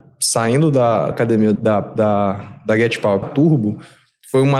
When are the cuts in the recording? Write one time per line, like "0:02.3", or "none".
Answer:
0:01.1
0:01.6
0:03.2